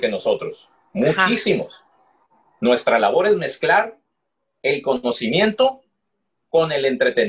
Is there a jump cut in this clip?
no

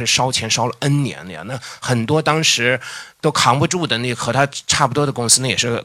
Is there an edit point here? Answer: yes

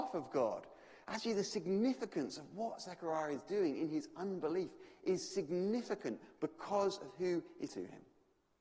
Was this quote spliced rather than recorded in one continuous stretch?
yes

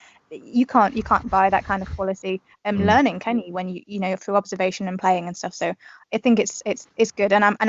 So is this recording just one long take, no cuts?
yes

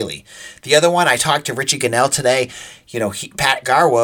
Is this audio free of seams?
yes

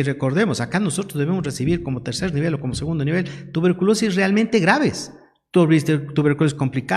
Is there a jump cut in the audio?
no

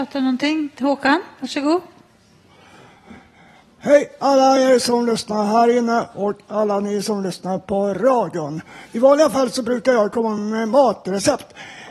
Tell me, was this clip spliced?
no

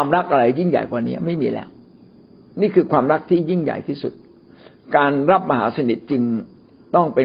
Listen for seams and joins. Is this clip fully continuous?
yes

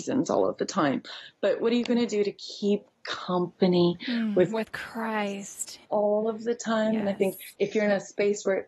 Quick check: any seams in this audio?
yes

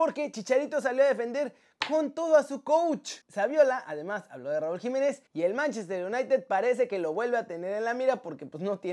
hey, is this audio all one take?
no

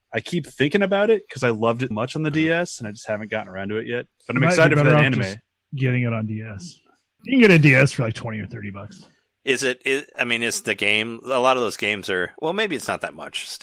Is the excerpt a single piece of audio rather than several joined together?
no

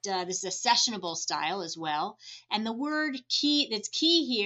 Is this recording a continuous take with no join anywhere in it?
yes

